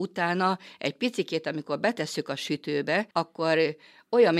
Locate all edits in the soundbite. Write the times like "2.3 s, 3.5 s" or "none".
3.1 s